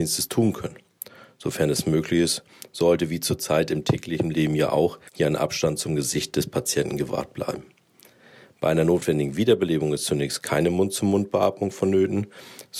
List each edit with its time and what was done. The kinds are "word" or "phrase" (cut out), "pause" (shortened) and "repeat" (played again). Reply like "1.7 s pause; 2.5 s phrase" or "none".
5.1 s pause